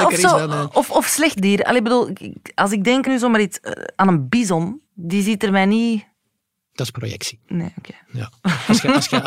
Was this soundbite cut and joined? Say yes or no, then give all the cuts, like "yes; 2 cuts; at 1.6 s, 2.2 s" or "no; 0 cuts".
yes; 4 cuts; at 1.4 s, 3.0 s, 4.8 s, 7.4 s